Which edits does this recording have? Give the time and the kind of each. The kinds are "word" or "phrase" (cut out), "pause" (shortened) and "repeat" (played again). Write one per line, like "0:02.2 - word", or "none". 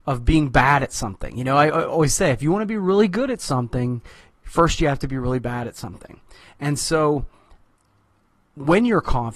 none